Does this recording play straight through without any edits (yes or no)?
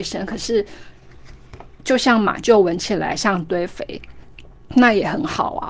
no